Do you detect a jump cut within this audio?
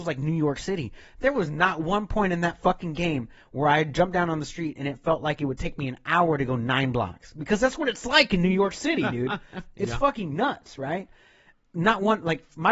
no; 0 cuts

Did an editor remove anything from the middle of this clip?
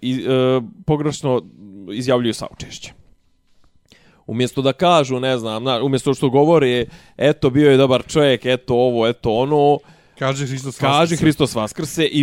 no; 0 cuts

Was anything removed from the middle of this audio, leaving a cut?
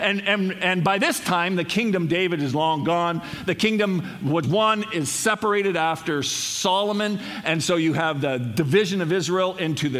yes; 1 cut; at 4.4 s

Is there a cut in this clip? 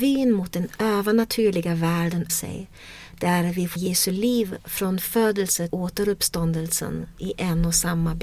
yes; 4 cuts; at 2.3 s, 3.8 s, 5.7 s, 7.2 s

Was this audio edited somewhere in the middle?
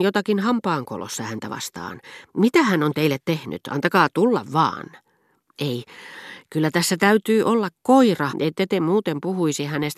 yes; 1 cut; at 8.3 s

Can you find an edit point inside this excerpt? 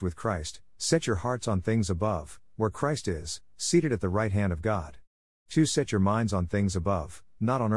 no; 0 cuts

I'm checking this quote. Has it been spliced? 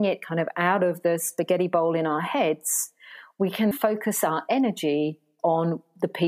yes; 1 cut; at 3.7 s

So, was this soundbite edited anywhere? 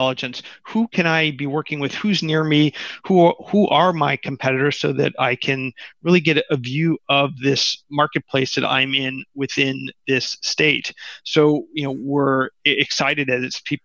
no; 0 cuts

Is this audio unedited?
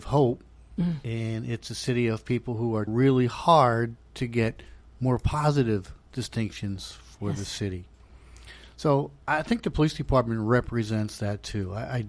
no; 1 cut; at 2.9 s

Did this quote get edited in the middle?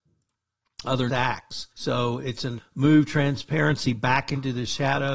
yes; 3 cuts; at 1.1 s, 1.7 s, 2.6 s

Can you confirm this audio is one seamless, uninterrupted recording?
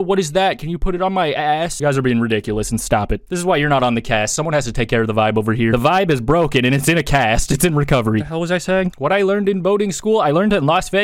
yes; 0 cuts

